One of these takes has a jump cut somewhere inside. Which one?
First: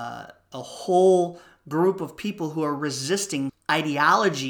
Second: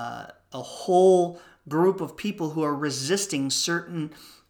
first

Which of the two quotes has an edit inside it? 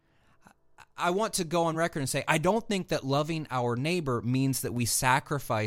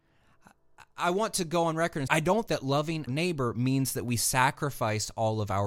second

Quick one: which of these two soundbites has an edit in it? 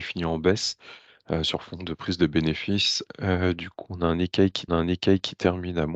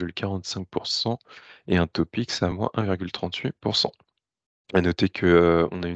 first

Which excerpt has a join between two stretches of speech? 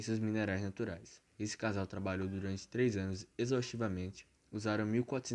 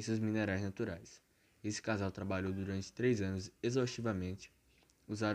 first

